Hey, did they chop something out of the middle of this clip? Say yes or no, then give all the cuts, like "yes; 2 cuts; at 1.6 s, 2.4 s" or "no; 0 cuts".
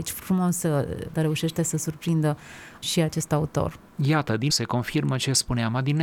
yes; 3 cuts; at 1.1 s, 2.8 s, 4.5 s